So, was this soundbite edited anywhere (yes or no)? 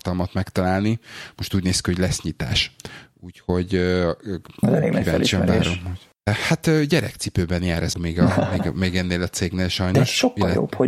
yes